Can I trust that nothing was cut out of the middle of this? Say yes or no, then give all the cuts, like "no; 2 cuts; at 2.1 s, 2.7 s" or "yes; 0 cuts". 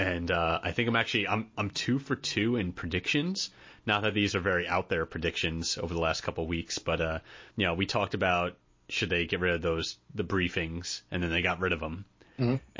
no; 2 cuts; at 7.5 s, 8.7 s